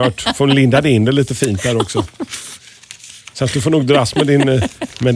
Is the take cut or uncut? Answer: uncut